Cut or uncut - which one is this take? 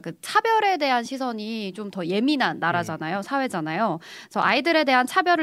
uncut